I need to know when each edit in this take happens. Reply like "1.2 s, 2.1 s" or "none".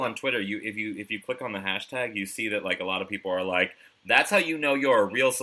none